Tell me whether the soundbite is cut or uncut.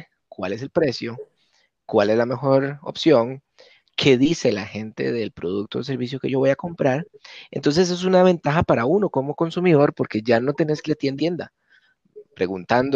cut